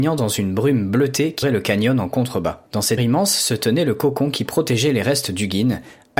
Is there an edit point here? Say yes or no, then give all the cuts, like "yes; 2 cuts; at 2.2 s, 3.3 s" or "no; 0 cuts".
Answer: yes; 3 cuts; at 1.4 s, 2.7 s, 3.0 s